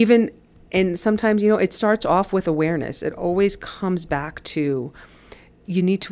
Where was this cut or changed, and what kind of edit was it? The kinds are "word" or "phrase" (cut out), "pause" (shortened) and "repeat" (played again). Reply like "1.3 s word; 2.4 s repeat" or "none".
none